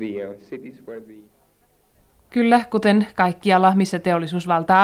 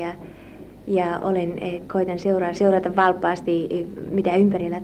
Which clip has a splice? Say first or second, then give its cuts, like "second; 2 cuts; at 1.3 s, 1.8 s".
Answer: second; 2 cuts; at 1.9 s, 2.5 s